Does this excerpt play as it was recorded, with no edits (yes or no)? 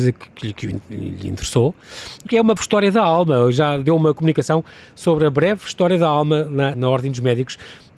no